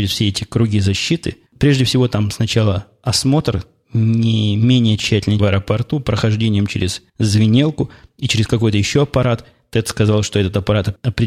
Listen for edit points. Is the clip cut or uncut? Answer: cut